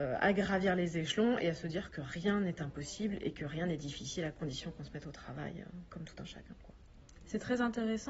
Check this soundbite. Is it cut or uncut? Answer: uncut